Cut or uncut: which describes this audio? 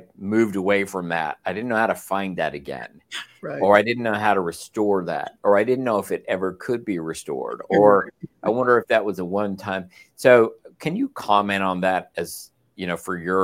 uncut